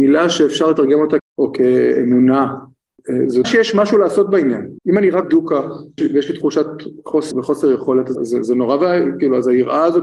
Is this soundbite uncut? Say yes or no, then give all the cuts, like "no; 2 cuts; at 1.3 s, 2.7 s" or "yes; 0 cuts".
no; 7 cuts; at 1.2 s, 3.4 s, 4.8 s, 5.2 s, 6.0 s, 7.3 s, 8.1 s